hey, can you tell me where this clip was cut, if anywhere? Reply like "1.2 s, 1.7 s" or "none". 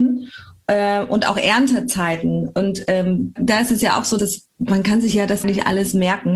3.4 s, 4.2 s, 5.4 s